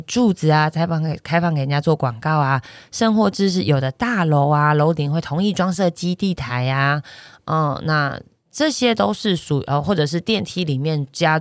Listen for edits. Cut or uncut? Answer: uncut